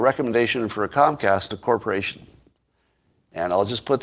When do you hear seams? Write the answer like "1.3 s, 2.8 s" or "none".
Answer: 1.5 s